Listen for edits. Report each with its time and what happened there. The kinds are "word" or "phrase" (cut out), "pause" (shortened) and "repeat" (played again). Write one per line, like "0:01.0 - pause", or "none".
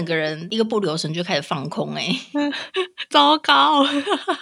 none